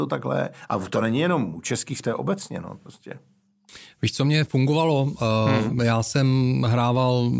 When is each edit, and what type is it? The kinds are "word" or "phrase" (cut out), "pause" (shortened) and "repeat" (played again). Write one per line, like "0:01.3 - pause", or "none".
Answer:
0:02.0 - word

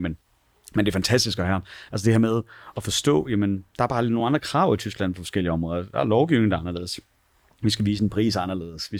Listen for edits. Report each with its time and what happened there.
none

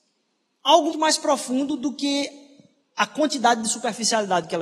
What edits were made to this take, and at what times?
0:00.9 - word

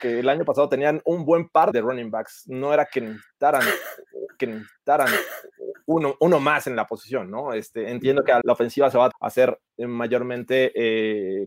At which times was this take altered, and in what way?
0:01.7 - word
0:04.4 - repeat
0:08.4 - phrase
0:09.1 - word
0:09.7 - pause

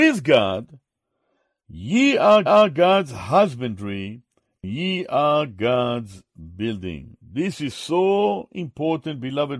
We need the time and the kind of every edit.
0:02.5 - repeat

